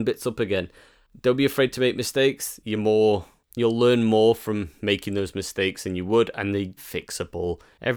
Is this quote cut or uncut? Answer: cut